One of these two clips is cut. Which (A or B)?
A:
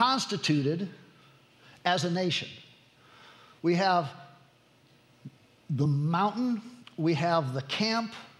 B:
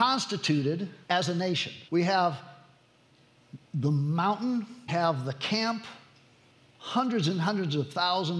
B